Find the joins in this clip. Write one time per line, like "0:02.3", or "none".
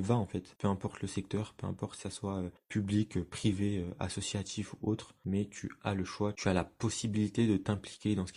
none